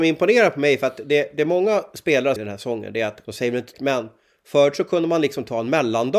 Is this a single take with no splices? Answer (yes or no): no